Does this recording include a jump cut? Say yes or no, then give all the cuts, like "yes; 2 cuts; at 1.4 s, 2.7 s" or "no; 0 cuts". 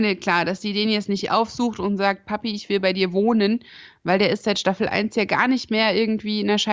no; 0 cuts